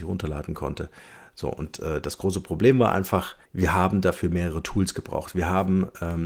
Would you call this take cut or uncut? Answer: cut